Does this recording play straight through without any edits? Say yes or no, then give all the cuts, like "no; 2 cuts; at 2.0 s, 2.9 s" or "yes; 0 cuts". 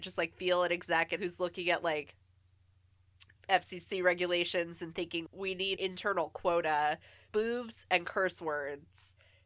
no; 5 cuts; at 1.2 s, 3.4 s, 5.3 s, 5.8 s, 7.3 s